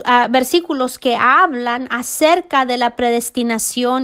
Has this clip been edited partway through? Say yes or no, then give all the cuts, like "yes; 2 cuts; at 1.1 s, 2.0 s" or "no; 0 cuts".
no; 0 cuts